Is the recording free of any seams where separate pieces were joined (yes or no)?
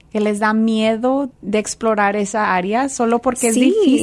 no